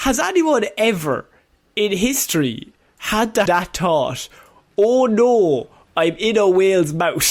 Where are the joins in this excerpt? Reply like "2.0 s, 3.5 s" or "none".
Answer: 3.5 s